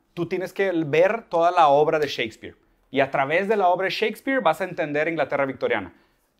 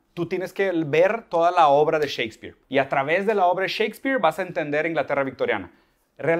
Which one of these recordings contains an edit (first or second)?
second